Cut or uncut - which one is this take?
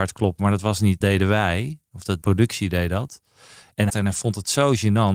cut